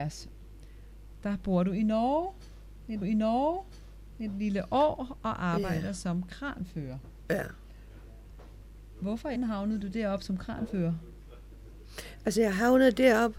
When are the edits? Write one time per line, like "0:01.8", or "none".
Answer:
0:03.0
0:09.4